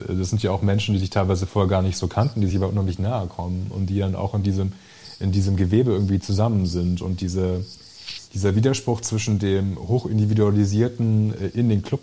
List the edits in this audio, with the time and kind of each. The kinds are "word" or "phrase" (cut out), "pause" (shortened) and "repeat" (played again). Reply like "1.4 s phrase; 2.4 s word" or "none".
none